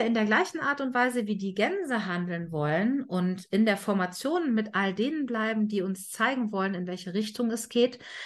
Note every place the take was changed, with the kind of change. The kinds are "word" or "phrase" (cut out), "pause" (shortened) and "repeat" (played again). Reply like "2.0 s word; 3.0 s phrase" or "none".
none